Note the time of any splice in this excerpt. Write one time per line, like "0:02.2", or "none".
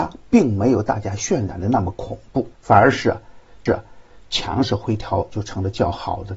0:02.5
0:03.7